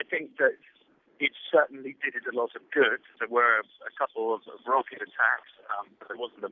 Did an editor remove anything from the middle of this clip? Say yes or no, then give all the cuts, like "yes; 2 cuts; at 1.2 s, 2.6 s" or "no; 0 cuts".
no; 0 cuts